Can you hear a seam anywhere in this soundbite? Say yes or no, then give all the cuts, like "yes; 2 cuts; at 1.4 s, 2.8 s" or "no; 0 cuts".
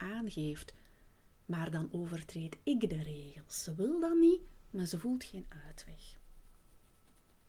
no; 0 cuts